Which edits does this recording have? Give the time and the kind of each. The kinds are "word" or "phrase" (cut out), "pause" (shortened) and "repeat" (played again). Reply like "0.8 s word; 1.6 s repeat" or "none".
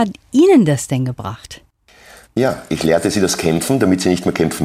none